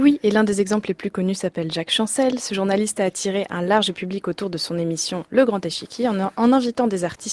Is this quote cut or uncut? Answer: uncut